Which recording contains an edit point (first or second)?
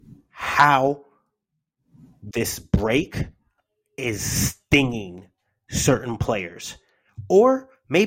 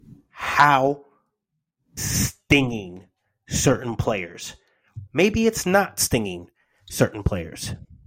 second